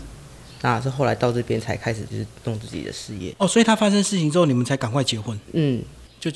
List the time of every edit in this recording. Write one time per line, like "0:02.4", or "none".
0:05.4